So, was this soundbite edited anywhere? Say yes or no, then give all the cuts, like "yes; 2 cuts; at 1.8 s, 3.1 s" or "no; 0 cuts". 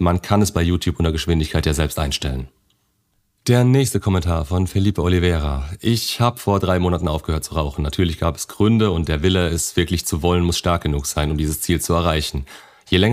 no; 0 cuts